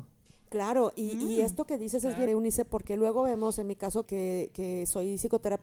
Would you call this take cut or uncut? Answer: cut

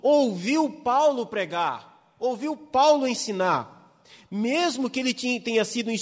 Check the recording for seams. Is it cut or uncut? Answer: uncut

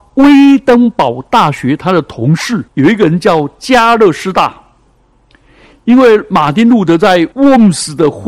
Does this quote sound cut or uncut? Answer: cut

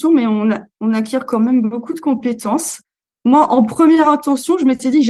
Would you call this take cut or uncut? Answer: uncut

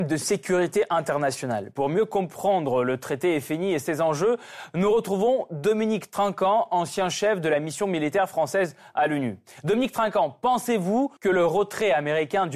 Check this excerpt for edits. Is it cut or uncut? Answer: cut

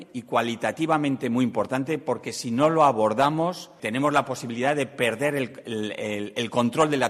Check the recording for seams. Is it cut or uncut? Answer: cut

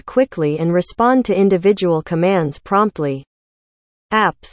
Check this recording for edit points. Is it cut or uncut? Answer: uncut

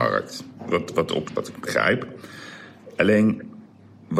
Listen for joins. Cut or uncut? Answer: cut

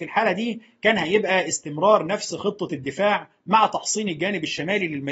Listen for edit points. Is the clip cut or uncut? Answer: uncut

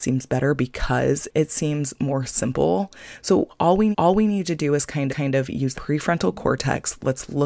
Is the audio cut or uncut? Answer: cut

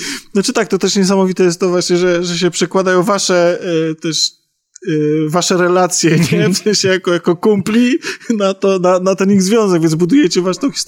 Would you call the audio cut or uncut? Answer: uncut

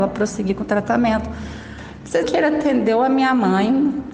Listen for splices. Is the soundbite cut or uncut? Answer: cut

